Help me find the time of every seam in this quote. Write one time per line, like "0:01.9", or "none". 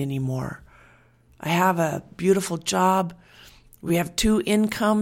none